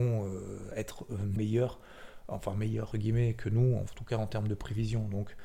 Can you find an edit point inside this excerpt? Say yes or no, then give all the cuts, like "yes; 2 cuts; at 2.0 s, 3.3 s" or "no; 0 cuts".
yes; 2 cuts; at 1.4 s, 2.9 s